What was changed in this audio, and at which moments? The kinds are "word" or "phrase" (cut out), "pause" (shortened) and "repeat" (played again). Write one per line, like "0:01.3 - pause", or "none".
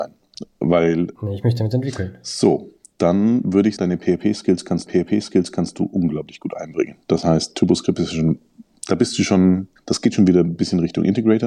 0:01.2 - word
0:03.8 - word
0:04.9 - repeat
0:07.0 - pause
0:09.8 - pause